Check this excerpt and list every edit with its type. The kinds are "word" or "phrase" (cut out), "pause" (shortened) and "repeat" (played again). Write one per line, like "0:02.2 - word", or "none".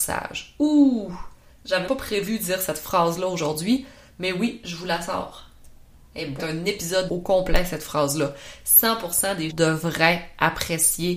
0:01.9 - word
0:06.4 - phrase
0:07.1 - phrase
0:09.5 - word